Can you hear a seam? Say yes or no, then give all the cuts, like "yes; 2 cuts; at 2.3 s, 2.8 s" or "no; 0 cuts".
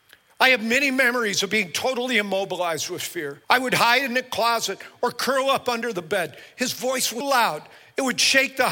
yes; 2 cuts; at 3.4 s, 7.2 s